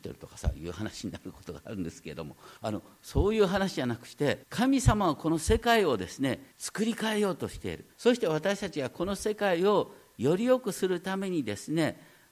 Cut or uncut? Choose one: cut